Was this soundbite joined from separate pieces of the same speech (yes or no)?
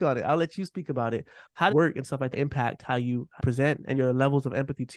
yes